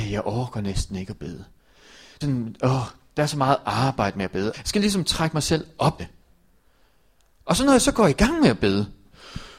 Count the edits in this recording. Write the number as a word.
three